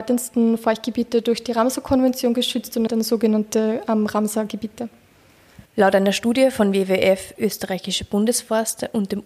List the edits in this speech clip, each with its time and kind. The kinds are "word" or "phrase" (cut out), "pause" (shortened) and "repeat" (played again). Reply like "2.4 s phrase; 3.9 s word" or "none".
2.9 s phrase; 5.7 s pause; 7.4 s word